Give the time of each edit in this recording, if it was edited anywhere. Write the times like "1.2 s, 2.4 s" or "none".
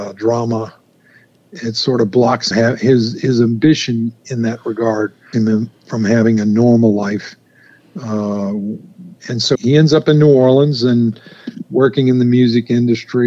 2.5 s, 5.3 s, 9.2 s, 9.6 s